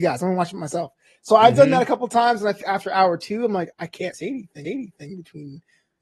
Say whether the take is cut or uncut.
cut